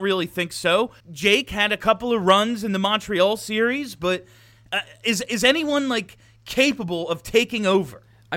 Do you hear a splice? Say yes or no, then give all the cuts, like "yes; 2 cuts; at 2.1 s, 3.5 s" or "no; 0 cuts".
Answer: yes; 1 cut; at 1.0 s